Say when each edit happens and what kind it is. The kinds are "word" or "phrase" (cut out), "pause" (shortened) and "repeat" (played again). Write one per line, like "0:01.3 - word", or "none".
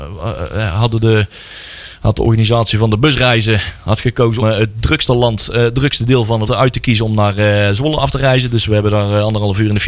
0:04.4 - word
0:06.5 - word